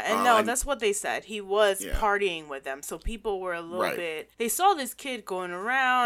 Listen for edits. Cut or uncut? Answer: cut